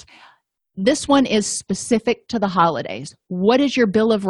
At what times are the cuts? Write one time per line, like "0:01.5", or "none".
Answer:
none

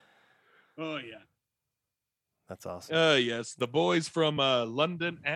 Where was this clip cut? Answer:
none

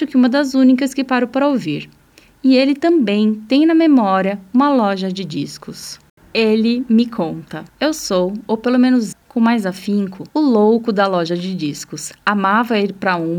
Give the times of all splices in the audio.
0:07.7
0:09.1
0:10.3

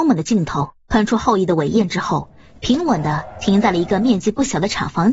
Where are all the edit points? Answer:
none

